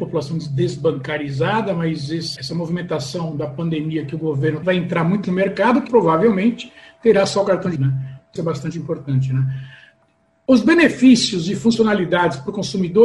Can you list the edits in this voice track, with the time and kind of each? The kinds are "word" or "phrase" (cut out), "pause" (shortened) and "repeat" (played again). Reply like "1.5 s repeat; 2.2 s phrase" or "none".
2.4 s word; 4.6 s word; 5.2 s word; 5.9 s word; 7.8 s word; 8.4 s word